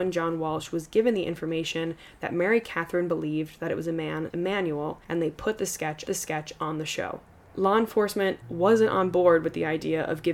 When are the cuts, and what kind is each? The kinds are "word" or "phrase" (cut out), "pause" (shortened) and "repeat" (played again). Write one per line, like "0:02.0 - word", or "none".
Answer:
0:04.3 - word
0:05.0 - pause
0:06.1 - repeat
0:08.4 - word